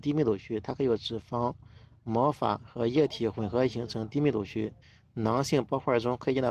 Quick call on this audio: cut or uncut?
cut